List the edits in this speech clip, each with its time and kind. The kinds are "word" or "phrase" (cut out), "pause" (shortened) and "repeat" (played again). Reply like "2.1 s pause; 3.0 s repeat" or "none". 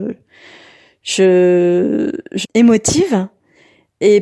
2.4 s phrase